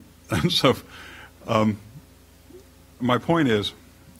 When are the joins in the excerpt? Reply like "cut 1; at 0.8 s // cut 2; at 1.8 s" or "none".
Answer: cut 1; at 3.0 s